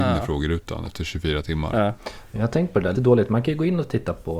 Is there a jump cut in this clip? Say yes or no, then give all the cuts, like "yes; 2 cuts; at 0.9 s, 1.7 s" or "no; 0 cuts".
yes; 1 cut; at 2.9 s